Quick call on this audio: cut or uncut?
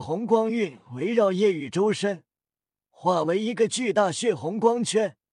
uncut